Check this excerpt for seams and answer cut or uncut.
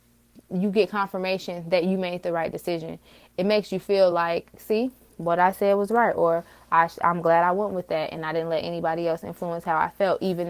uncut